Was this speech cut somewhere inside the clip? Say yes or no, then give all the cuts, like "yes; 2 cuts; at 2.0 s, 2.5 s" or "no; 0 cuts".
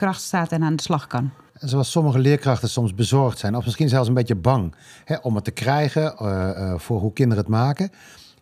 no; 0 cuts